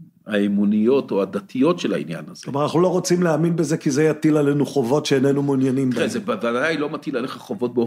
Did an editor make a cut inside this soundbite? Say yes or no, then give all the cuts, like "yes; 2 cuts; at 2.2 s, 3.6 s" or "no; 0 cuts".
no; 0 cuts